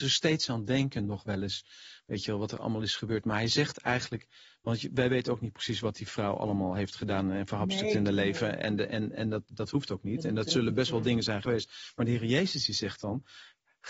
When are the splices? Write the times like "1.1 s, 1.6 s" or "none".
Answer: none